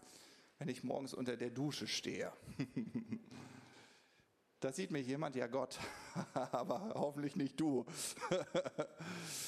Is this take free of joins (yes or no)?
yes